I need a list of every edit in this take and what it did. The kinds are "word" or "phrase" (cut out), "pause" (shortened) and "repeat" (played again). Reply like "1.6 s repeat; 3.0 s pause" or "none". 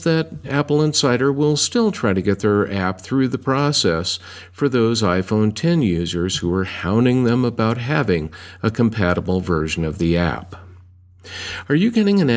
none